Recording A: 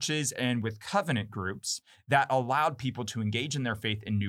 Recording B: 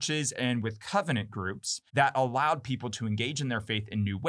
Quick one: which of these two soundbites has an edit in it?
B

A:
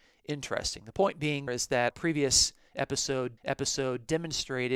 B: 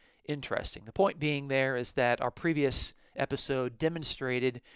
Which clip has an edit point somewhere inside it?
A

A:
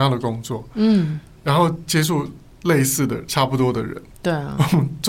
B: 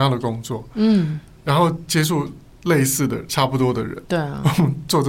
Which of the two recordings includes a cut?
B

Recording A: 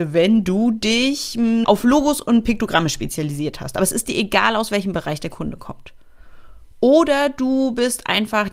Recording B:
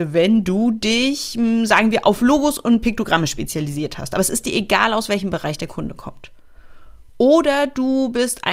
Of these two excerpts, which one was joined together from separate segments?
A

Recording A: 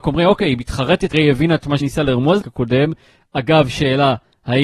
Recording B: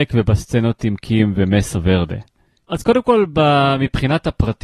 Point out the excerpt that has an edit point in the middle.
A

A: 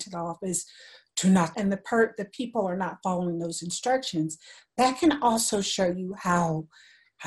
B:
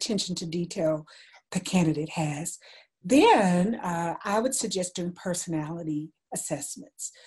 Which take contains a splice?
A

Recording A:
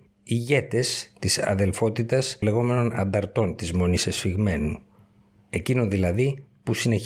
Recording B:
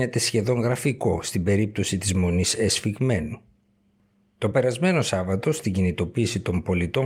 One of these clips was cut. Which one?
A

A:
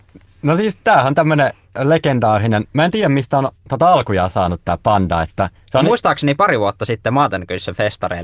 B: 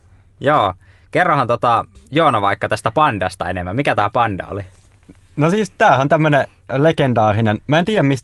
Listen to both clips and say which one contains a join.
A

